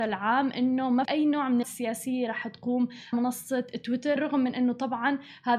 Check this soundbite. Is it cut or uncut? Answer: cut